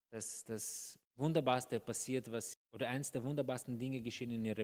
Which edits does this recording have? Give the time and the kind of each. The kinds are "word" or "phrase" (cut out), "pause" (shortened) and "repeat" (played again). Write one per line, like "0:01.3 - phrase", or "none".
0:02.5 - word